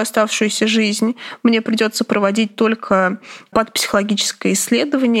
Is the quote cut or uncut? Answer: uncut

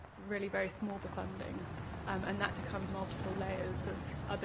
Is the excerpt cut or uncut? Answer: cut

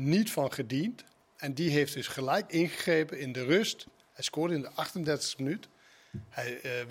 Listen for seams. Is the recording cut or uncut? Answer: uncut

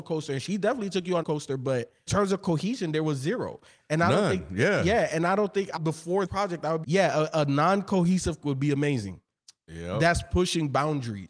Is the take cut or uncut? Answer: cut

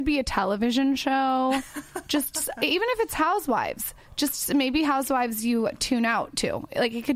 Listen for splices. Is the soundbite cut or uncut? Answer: uncut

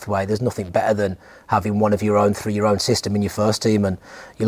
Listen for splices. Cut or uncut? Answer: uncut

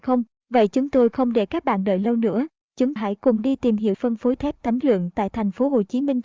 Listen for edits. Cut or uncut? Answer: cut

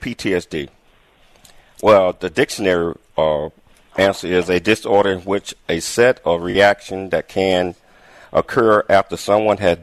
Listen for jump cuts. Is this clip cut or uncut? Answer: uncut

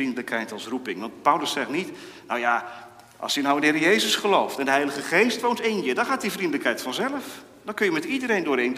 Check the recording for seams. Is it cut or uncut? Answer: uncut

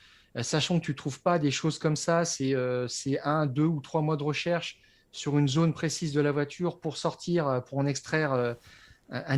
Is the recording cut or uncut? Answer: uncut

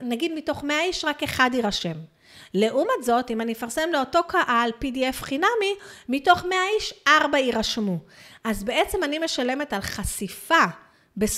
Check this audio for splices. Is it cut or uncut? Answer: uncut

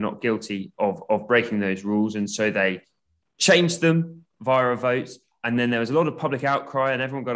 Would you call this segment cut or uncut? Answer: uncut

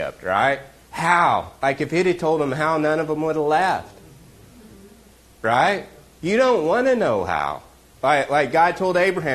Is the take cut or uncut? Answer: uncut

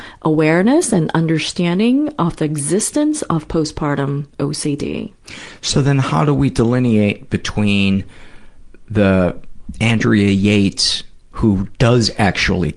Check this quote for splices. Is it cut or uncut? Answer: uncut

